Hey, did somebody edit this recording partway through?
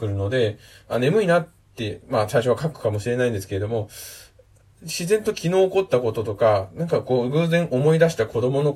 no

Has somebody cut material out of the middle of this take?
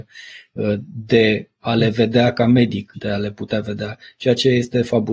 yes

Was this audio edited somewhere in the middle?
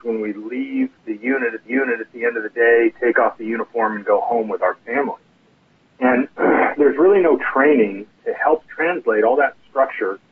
yes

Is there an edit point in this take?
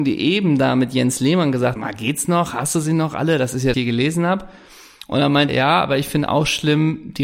yes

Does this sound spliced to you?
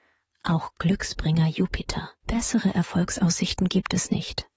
yes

